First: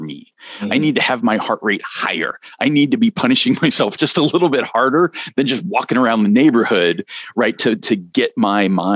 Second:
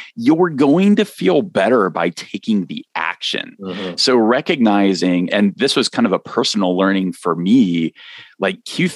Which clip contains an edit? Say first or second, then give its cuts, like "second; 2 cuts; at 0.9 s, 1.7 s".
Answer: second; 1 cut; at 5.3 s